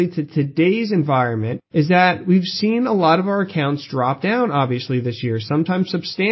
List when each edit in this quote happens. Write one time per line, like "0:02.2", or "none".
0:01.7